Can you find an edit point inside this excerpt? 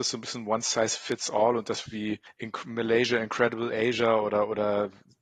yes; 1 cut; at 1.9 s

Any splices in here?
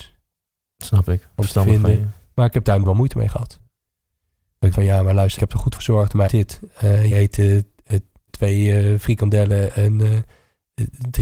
yes; 7 cuts; at 2.8 s, 4.7 s, 5.4 s, 5.8 s, 6.3 s, 7.1 s, 8.3 s

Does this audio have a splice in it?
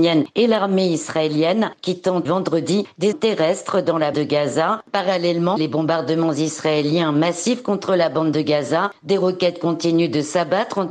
yes; 4 cuts; at 2.2 s, 3.1 s, 4.1 s, 5.6 s

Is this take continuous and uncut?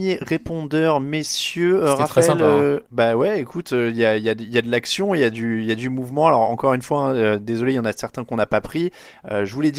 no; 1 cut; at 2.9 s

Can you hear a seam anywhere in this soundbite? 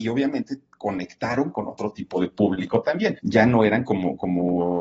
yes; 1 cut; at 3.2 s

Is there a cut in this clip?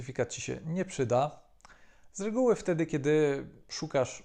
no; 0 cuts

